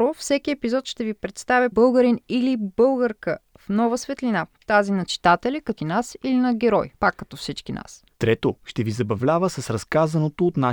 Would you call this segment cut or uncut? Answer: cut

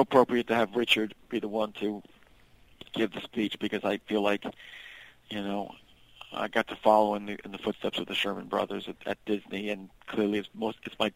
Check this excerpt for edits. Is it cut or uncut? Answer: uncut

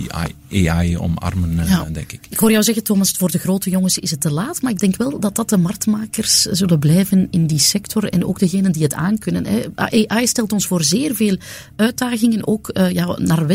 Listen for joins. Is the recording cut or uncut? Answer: uncut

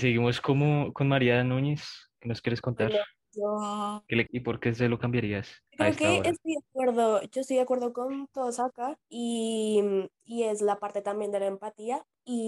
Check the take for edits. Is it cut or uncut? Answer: cut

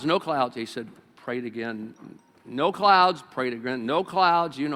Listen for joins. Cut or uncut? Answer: uncut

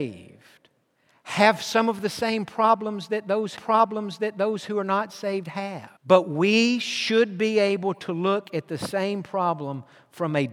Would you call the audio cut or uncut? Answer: cut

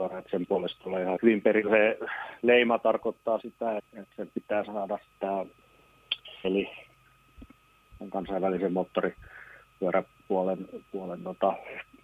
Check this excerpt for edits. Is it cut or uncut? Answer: cut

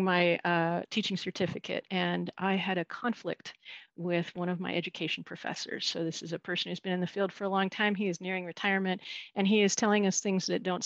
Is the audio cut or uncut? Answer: uncut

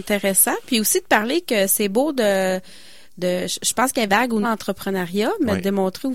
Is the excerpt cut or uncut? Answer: cut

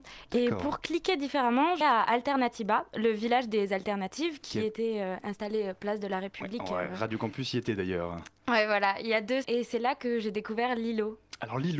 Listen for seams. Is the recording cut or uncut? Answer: cut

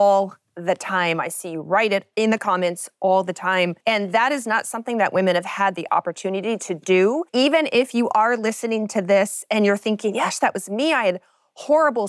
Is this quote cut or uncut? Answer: cut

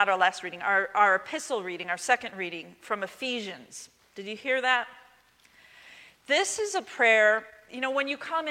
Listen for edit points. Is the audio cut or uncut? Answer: uncut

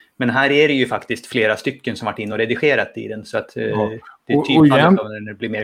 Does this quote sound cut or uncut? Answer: uncut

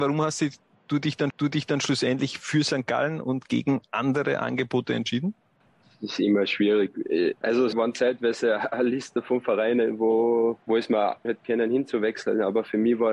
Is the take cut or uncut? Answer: cut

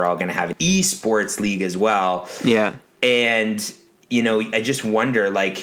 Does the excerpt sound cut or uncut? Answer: cut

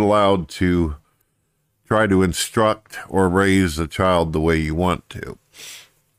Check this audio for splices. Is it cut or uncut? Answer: uncut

